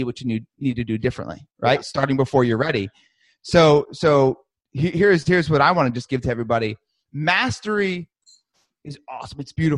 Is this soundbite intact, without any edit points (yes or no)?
yes